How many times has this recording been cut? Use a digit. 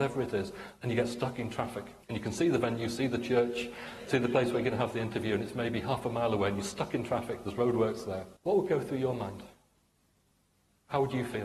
2